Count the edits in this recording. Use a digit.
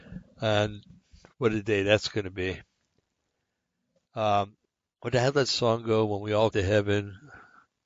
2